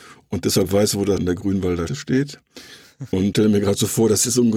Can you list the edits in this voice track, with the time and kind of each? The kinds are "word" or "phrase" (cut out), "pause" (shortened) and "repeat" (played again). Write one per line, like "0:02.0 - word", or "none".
0:01.2 - word
0:01.9 - word
0:03.3 - word